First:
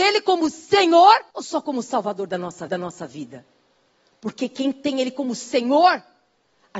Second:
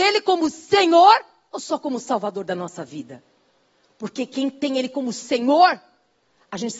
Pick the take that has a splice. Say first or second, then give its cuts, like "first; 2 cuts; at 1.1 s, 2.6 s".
first; 2 cuts; at 1.3 s, 2.7 s